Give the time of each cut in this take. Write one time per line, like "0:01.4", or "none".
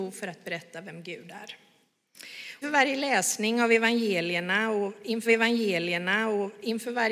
0:02.6
0:05.3